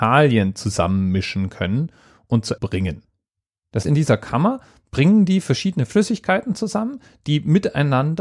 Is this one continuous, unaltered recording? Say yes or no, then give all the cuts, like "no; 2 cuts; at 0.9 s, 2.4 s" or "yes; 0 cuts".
no; 2 cuts; at 2.6 s, 3.8 s